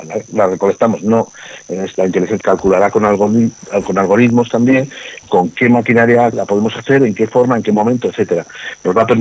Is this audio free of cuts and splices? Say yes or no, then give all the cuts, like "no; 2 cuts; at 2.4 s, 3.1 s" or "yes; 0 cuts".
no; 4 cuts; at 1.9 s, 2.4 s, 5.2 s, 6.3 s